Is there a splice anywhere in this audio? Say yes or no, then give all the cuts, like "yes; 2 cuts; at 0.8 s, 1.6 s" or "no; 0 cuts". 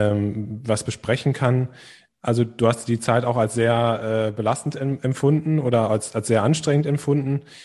no; 0 cuts